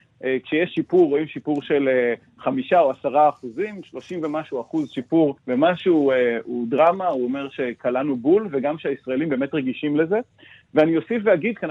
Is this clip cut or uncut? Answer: cut